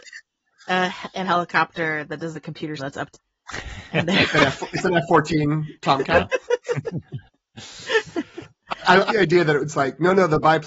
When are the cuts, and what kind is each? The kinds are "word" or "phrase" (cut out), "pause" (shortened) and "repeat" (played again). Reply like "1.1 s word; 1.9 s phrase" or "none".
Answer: 1.2 s word; 2.3 s word; 2.8 s word; 3.1 s word; 3.9 s word; 9.1 s word